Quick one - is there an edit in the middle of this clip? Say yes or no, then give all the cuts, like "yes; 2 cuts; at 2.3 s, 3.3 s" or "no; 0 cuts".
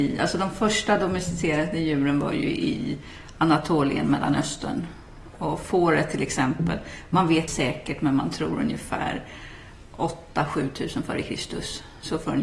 yes; 1 cut; at 7.5 s